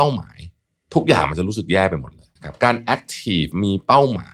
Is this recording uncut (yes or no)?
no